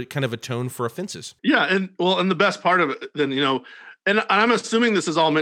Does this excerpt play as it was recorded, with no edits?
no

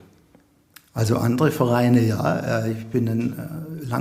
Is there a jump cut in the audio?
no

